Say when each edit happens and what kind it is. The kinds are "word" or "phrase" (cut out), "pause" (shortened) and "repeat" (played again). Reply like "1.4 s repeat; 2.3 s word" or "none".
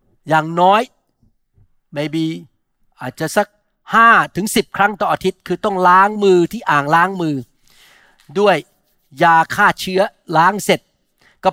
none